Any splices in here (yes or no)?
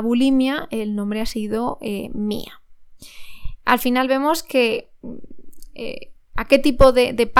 no